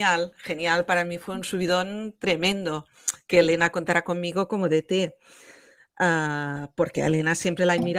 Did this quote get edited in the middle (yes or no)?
no